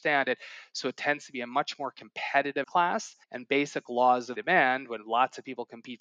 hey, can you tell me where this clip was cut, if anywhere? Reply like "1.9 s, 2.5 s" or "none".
2.6 s, 3.2 s, 4.4 s